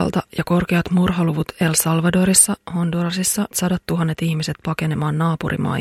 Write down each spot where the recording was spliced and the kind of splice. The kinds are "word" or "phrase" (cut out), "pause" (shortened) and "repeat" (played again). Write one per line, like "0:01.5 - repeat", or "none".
0:03.5 - phrase